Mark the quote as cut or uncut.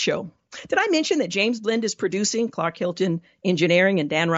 uncut